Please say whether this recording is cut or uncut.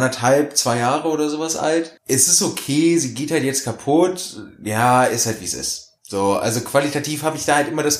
cut